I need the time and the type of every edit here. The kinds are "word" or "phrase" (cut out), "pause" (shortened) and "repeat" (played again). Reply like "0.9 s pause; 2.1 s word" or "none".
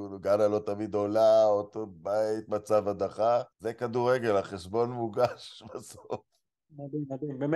3.5 s pause